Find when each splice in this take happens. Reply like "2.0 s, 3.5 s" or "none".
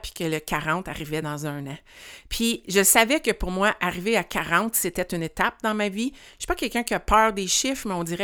none